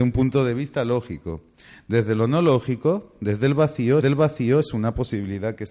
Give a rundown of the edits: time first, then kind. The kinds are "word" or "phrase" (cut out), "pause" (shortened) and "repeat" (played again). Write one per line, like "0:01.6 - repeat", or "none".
0:04.0 - repeat